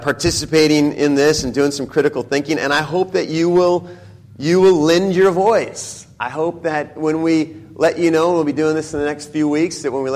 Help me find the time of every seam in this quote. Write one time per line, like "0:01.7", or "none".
none